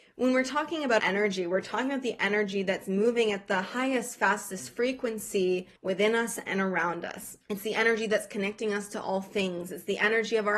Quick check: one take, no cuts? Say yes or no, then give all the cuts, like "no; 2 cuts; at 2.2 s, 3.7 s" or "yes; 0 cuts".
no; 3 cuts; at 1.0 s, 5.8 s, 7.4 s